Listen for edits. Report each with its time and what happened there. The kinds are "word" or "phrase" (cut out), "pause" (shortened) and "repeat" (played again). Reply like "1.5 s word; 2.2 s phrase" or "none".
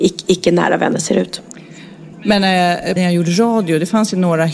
2.1 s pause; 3.0 s phrase